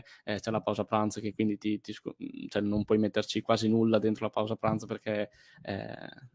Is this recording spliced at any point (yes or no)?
no